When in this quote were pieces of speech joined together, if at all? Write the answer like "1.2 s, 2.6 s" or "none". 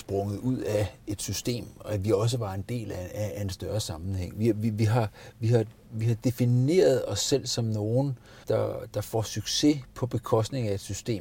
8.4 s

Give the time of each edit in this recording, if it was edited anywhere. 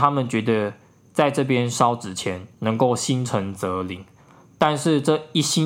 2.5 s

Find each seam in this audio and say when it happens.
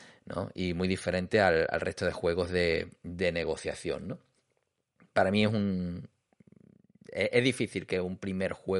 none

